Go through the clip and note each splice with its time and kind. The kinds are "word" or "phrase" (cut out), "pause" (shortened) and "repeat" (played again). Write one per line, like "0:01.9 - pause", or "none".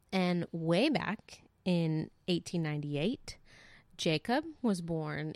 none